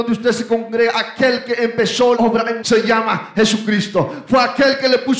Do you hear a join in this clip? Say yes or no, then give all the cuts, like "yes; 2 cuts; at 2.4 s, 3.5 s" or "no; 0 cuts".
yes; 2 cuts; at 2.2 s, 2.6 s